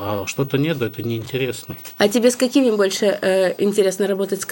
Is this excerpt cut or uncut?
uncut